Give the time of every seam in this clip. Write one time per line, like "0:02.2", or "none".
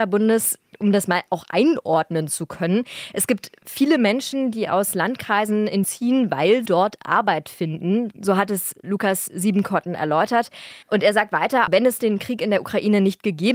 0:05.8
0:06.7
0:10.8